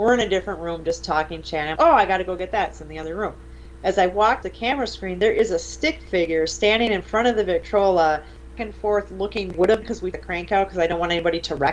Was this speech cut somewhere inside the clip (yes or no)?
yes